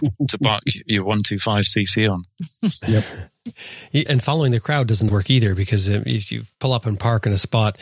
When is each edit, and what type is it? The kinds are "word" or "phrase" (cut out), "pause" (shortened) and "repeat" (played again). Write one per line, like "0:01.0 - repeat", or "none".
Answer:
0:04.1 - word
0:05.1 - word